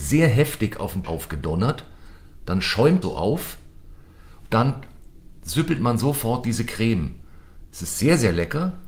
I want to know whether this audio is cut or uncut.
cut